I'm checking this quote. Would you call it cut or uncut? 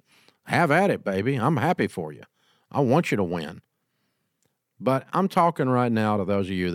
uncut